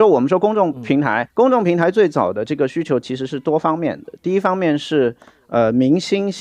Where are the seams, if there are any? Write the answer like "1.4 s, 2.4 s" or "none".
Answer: 1.3 s